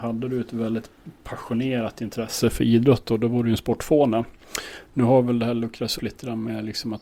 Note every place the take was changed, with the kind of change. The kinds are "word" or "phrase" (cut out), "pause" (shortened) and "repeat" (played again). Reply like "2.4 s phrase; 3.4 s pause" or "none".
5.9 s word